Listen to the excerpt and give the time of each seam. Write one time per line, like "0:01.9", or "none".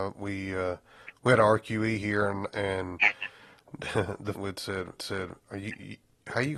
0:04.3
0:05.0